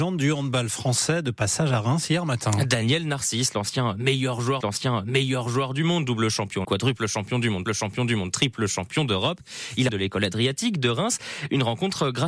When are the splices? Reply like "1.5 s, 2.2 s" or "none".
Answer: 4.6 s, 6.6 s, 7.7 s, 9.9 s

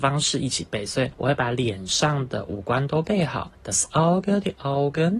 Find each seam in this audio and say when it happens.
none

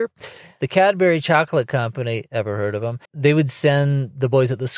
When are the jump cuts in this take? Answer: 3.1 s

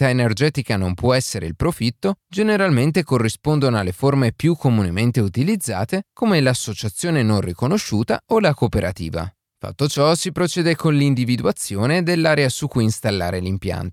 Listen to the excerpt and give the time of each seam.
none

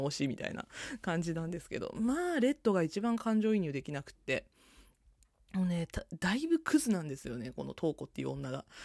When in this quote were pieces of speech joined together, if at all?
none

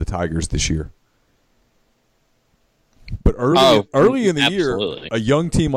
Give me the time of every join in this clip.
none

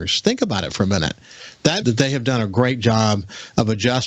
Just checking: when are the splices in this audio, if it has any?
1.8 s

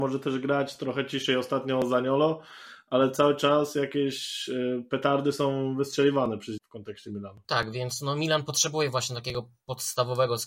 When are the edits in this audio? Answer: 6.6 s, 7.4 s

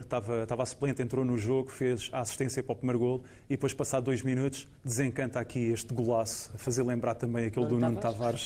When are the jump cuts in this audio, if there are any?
4.8 s

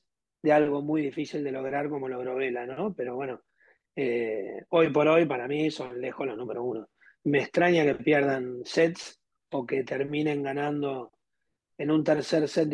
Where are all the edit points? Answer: none

